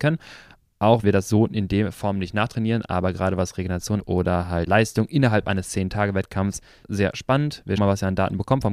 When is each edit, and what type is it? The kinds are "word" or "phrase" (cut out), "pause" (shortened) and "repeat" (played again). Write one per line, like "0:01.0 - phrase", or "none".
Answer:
0:01.0 - word
0:04.0 - word
0:04.7 - word
0:06.8 - word
0:07.8 - word